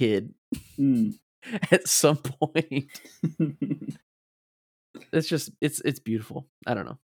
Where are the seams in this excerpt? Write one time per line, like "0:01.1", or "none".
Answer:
none